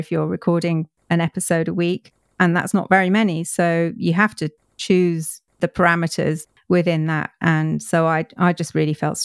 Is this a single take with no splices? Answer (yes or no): yes